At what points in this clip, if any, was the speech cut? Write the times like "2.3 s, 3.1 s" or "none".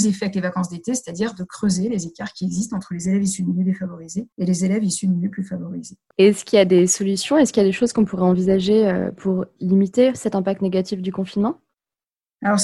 4.3 s